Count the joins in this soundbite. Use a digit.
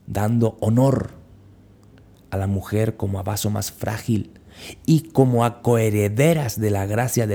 0